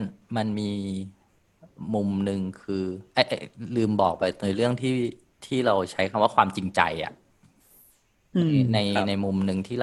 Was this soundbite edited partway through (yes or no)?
no